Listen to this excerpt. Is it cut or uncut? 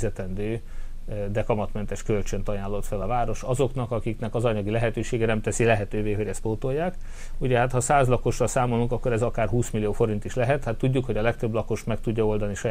uncut